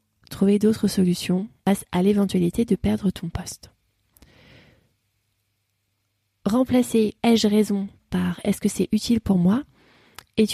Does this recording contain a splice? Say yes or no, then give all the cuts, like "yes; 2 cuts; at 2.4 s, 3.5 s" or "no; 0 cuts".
yes; 1 cut; at 7.2 s